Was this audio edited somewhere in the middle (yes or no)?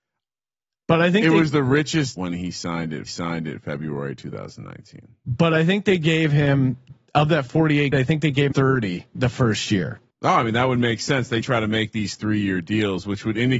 yes